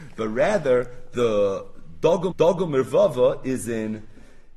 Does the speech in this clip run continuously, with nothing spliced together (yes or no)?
no